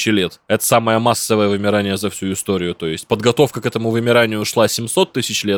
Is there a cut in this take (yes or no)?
no